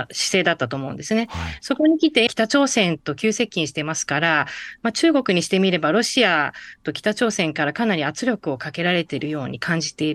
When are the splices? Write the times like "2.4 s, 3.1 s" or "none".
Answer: 2.3 s